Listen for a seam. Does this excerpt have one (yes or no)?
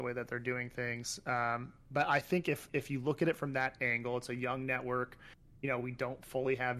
no